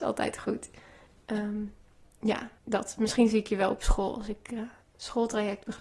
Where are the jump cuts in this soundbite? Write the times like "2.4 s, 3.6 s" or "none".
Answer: 2.6 s, 4.8 s